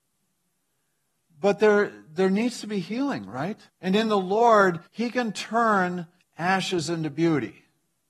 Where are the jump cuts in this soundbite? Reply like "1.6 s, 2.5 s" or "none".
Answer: 3.7 s, 4.9 s, 6.2 s